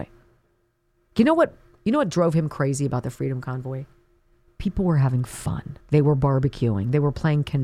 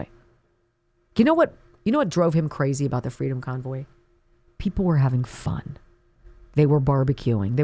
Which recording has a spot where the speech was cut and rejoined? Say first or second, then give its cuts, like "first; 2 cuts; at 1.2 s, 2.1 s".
first; 1 cut; at 5.8 s